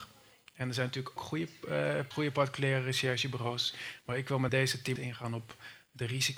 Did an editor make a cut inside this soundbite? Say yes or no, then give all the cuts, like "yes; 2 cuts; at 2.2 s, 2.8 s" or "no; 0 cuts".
yes; 4 cuts; at 1.2 s, 2.1 s, 4.5 s, 5.0 s